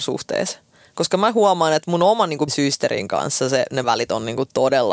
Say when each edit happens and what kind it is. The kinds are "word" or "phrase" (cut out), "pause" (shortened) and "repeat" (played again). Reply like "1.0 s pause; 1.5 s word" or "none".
2.5 s word; 3.8 s word